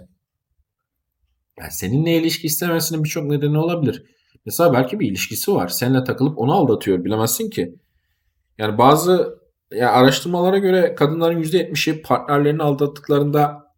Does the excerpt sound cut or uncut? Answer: uncut